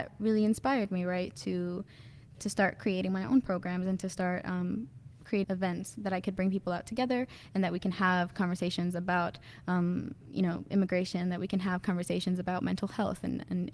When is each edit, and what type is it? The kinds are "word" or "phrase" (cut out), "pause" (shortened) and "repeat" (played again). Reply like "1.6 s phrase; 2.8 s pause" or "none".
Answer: 2.3 s word; 5.4 s phrase